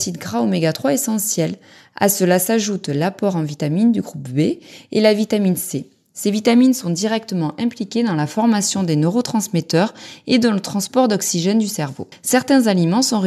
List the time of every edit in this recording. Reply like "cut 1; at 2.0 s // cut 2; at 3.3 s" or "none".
none

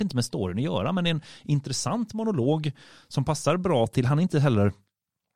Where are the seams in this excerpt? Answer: none

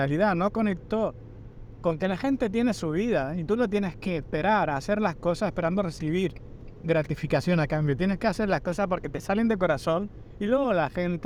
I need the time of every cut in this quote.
none

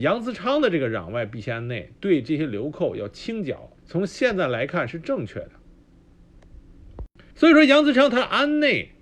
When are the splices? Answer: cut 1; at 3.8 s // cut 2; at 7.3 s

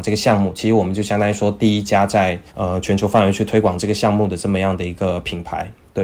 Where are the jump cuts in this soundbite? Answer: cut 1; at 2.5 s

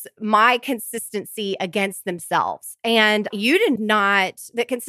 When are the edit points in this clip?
cut 1; at 3.3 s // cut 2; at 3.8 s

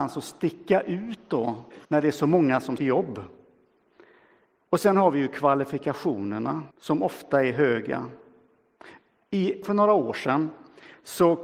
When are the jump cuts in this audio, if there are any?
cut 1; at 1.8 s // cut 2; at 2.8 s // cut 3; at 6.7 s // cut 4; at 9.6 s

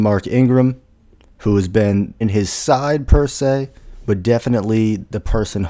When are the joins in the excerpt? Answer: cut 1; at 2.2 s

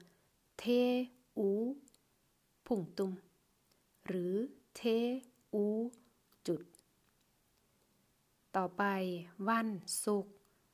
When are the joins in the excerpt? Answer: none

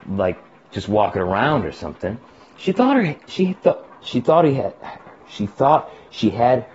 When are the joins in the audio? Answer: none

